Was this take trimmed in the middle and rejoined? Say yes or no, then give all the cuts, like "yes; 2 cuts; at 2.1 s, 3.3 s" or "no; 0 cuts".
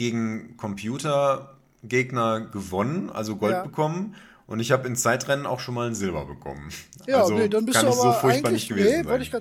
no; 0 cuts